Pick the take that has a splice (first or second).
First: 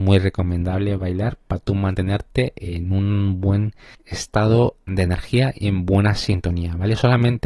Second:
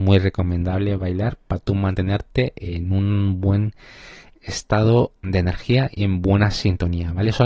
first